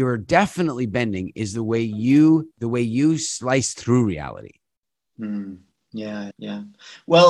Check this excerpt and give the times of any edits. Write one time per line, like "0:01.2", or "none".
0:02.5
0:06.3